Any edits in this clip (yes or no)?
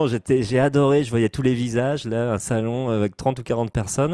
no